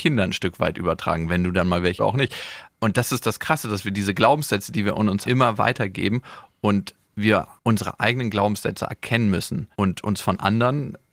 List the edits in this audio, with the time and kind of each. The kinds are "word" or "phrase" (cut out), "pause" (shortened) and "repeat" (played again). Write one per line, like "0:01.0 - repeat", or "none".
0:02.0 - phrase
0:05.2 - word
0:08.9 - word
0:09.7 - pause